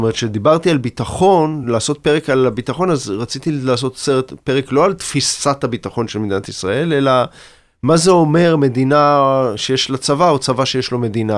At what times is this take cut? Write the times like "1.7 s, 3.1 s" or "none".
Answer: none